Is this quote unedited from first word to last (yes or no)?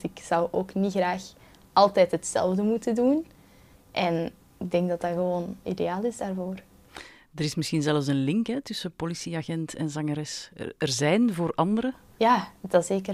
no